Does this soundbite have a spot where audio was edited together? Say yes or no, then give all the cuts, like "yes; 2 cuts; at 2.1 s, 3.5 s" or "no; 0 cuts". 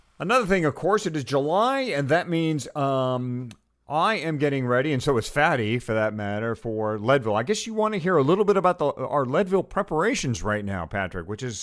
no; 0 cuts